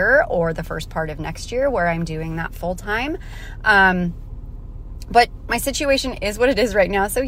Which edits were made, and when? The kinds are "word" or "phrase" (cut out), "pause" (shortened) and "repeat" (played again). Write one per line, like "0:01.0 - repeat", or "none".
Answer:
none